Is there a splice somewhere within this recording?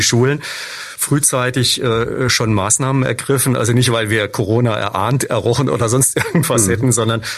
no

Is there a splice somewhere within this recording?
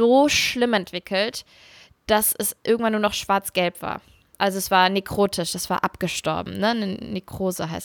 no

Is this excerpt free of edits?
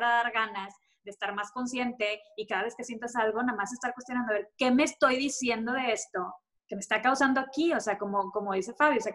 yes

